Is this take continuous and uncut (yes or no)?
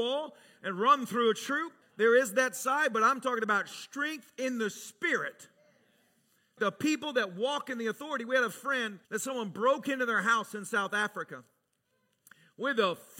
no